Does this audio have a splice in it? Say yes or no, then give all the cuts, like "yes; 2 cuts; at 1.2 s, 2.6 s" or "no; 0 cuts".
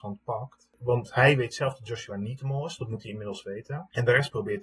no; 0 cuts